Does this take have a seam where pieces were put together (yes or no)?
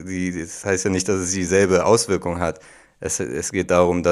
no